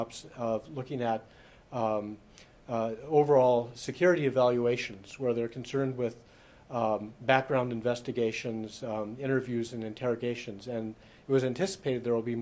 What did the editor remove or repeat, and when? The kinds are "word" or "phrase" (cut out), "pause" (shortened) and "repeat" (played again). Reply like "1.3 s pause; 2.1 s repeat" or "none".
none